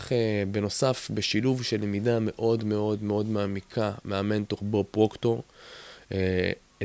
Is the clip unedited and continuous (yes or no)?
yes